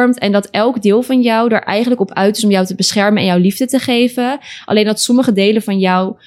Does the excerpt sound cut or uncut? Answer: uncut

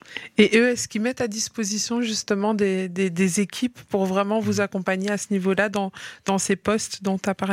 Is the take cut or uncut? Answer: uncut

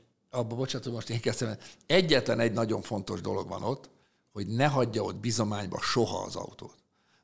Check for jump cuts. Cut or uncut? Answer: uncut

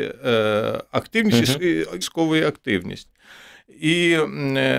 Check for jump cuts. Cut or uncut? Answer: cut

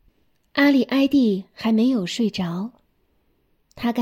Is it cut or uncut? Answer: uncut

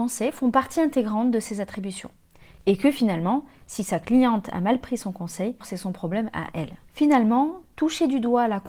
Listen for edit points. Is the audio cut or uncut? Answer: cut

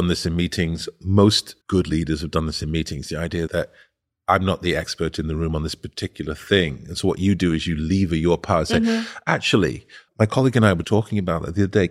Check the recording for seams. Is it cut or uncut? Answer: cut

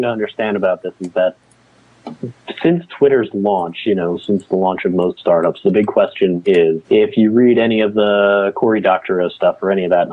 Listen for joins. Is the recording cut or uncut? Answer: cut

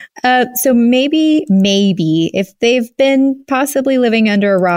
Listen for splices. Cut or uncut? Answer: uncut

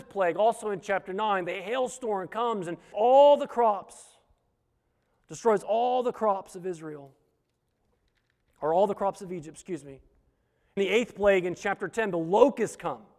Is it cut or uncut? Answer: cut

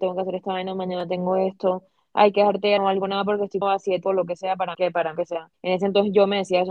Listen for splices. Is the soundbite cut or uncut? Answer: cut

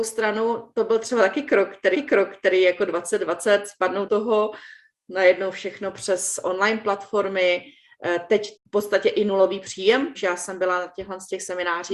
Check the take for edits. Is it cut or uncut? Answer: cut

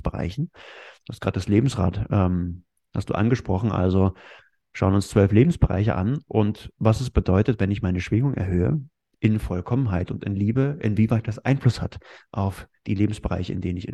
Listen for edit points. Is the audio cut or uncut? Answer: uncut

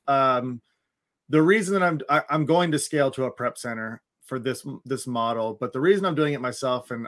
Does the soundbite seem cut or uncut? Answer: cut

